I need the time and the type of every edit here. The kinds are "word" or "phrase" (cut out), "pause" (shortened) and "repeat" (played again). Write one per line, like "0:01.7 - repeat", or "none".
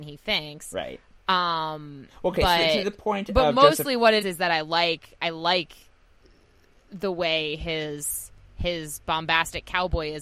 0:04.2 - word